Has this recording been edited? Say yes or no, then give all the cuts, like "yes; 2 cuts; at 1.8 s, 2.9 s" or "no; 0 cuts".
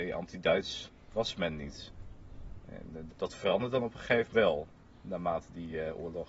yes; 2 cuts; at 3.1 s, 4.3 s